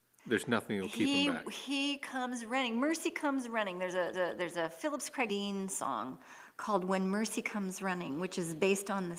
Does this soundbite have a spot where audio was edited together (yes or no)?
yes